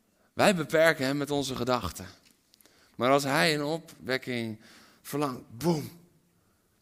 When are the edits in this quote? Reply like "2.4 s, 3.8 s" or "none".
none